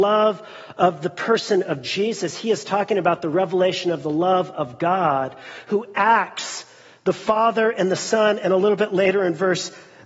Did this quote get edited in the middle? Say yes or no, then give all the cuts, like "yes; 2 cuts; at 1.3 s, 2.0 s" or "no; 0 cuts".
no; 0 cuts